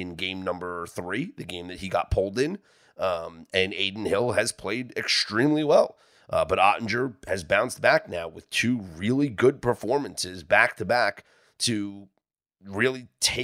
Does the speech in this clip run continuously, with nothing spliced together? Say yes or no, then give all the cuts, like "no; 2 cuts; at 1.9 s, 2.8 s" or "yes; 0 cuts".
yes; 0 cuts